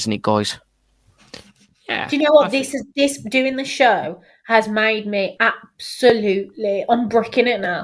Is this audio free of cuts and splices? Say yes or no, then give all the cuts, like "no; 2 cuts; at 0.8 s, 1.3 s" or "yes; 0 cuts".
yes; 0 cuts